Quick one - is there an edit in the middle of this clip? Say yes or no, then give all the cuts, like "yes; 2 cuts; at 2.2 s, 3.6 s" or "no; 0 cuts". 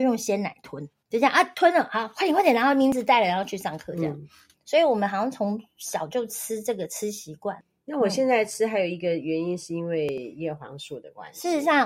no; 0 cuts